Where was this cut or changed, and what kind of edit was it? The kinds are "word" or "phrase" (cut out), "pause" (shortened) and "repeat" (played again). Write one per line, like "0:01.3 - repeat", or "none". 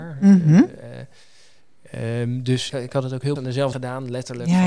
0:02.7 - word
0:03.4 - word
0:03.7 - word